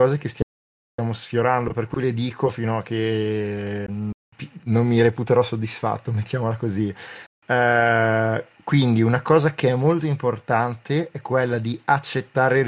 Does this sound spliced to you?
no; 0 cuts

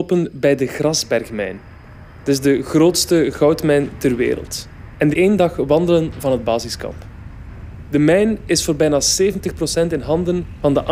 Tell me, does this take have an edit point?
yes; 1 cut; at 5.1 s

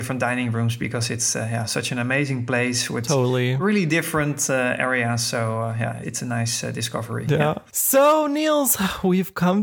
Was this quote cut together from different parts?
no; 0 cuts

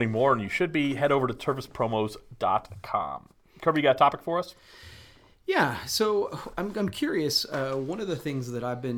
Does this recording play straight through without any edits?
yes; 0 cuts

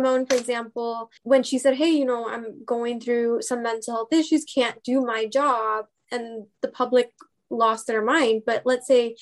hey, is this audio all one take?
no; 1 cut; at 1.2 s

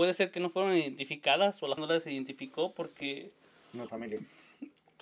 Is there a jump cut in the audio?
yes; 2 cuts; at 1.8 s, 3.9 s

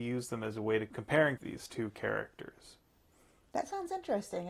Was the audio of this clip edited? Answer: yes; 1 cut; at 1.4 s

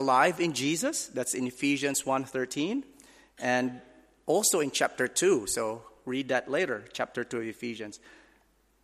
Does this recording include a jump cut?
no; 0 cuts

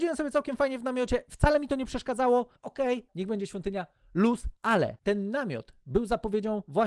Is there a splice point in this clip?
yes; 2 cuts; at 2.6 s, 3.1 s

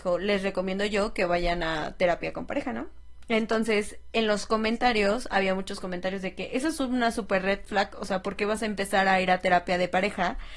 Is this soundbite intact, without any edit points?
yes; 0 cuts

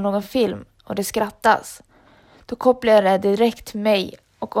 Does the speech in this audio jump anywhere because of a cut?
no; 0 cuts

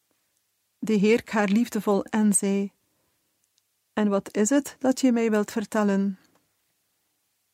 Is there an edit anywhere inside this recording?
yes; 2 cuts; at 1.2 s, 2.1 s

